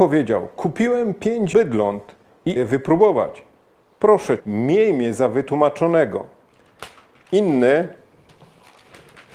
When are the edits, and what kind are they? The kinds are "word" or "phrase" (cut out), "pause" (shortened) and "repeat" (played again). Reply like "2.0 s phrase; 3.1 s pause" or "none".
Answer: 1.5 s word; 2.6 s word; 4.4 s word